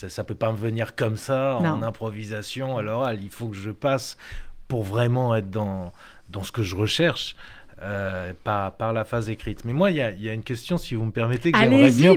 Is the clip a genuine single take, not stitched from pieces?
yes; 0 cuts

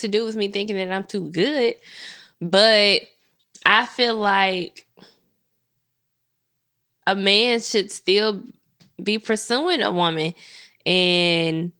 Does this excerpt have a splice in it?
no; 0 cuts

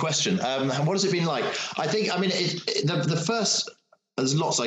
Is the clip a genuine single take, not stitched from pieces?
yes; 0 cuts

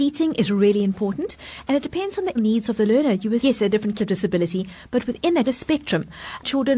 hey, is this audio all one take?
no; 4 cuts; at 2.4 s, 3.4 s, 4.0 s, 5.5 s

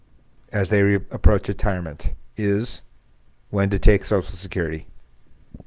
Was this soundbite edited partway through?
no; 0 cuts

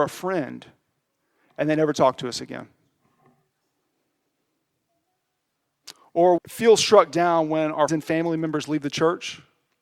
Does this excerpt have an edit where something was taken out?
yes; 2 cuts; at 6.4 s, 7.9 s

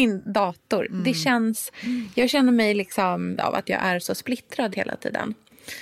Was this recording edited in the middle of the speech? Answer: yes; 2 cuts; at 3.4 s, 4.7 s

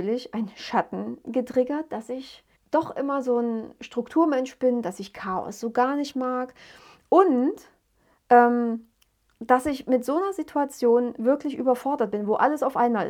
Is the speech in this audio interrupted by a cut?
yes; 1 cut; at 2.5 s

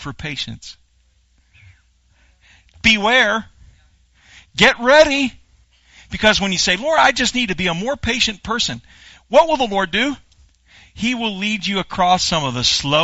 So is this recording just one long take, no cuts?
yes; 0 cuts

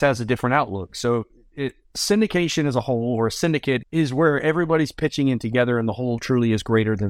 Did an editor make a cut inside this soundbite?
no; 0 cuts

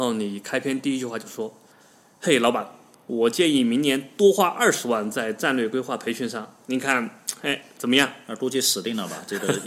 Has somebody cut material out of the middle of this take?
no; 0 cuts

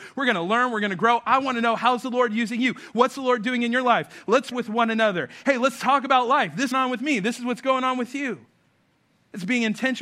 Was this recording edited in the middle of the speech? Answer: yes; 2 cuts; at 4.5 s, 6.7 s

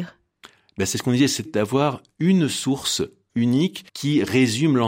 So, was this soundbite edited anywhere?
yes; 2 cuts; at 1.4 s, 3.9 s

